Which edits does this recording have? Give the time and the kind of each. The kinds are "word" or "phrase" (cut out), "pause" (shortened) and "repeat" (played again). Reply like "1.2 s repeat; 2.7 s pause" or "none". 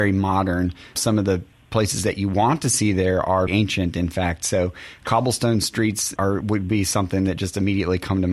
1.0 s word; 3.5 s word; 6.2 s word